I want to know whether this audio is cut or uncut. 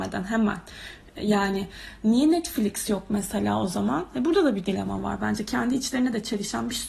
uncut